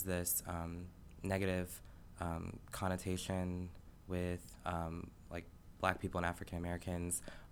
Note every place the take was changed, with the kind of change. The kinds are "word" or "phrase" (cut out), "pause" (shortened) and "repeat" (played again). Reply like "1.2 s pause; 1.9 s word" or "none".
none